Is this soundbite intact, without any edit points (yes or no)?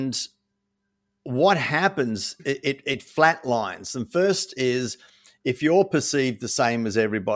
no